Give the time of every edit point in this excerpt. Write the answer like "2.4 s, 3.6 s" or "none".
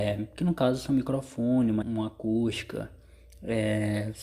1.8 s